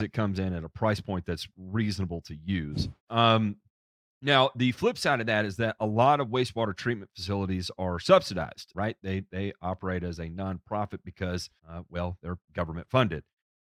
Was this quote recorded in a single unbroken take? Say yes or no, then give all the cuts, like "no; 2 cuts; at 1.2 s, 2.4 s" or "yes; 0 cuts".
no; 3 cuts; at 3.0 s, 8.7 s, 11.6 s